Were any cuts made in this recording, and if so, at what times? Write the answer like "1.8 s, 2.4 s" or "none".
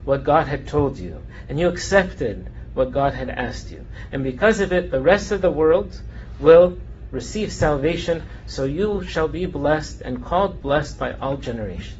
none